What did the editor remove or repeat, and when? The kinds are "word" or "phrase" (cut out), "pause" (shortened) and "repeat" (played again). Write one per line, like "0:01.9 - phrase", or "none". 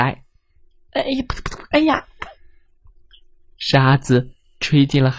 none